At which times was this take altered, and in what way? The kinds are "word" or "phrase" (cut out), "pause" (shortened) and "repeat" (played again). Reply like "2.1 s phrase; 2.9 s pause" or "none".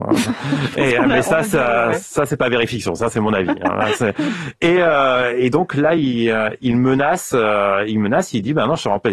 none